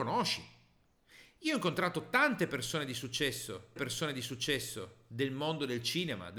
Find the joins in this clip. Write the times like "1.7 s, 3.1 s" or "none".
3.8 s